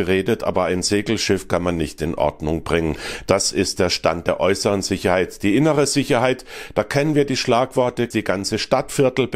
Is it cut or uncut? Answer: cut